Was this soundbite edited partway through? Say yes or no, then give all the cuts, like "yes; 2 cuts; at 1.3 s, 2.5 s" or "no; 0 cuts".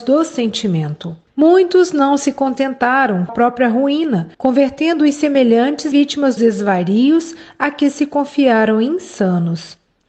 yes; 5 cuts; at 1.3 s, 3.3 s, 4.3 s, 5.9 s, 6.4 s